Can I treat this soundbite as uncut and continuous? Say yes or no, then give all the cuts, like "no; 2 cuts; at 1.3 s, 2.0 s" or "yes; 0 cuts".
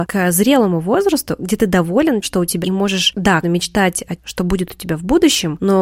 no; 4 cuts; at 2.2 s, 2.6 s, 3.4 s, 4.2 s